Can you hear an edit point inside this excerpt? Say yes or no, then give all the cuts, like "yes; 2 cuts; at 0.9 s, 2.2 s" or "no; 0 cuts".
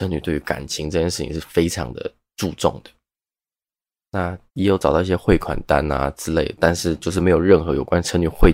yes; 1 cut; at 4.5 s